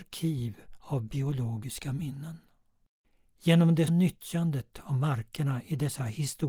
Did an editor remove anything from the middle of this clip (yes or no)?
yes